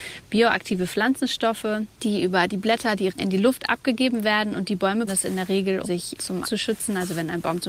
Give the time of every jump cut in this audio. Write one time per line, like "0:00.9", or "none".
0:01.9
0:03.1
0:05.1
0:05.8
0:06.4